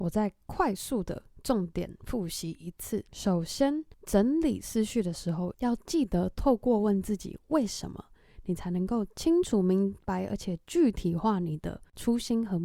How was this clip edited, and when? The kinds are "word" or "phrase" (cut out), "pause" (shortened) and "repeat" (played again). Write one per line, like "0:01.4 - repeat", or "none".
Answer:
0:03.1 - pause